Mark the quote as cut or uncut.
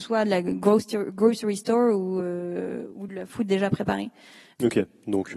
uncut